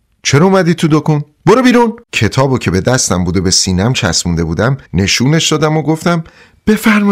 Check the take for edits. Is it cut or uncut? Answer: cut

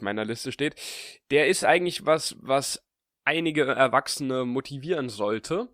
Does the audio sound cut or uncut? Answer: uncut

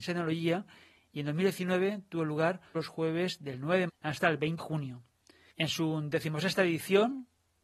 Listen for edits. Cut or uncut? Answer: cut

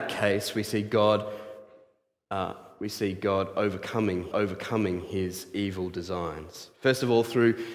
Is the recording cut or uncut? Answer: cut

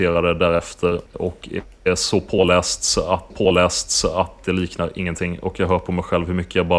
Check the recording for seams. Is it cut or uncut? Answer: cut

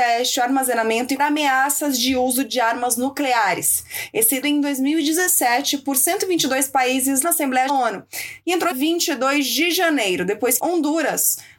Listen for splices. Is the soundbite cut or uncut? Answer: cut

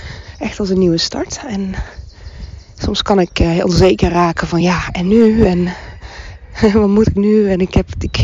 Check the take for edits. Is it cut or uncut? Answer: uncut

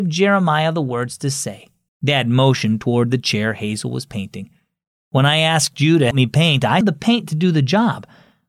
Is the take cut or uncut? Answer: cut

